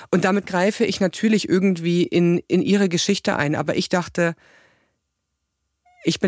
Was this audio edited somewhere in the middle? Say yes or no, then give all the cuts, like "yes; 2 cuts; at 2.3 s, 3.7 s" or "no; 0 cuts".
no; 0 cuts